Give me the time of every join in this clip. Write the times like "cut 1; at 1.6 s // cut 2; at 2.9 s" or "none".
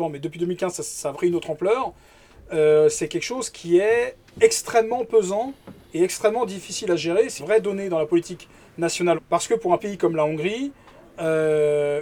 cut 1; at 1.1 s // cut 2; at 7.4 s // cut 3; at 9.1 s // cut 4; at 9.8 s